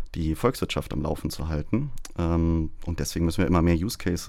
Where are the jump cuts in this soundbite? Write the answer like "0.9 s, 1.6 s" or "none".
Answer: none